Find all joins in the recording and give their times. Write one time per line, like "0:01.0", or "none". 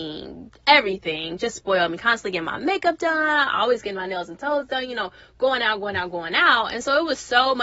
none